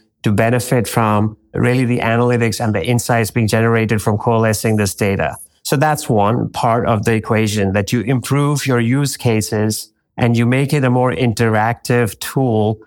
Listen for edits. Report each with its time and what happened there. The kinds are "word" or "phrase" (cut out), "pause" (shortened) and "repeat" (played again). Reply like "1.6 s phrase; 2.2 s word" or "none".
none